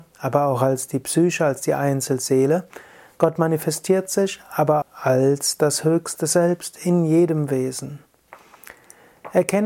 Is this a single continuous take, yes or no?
no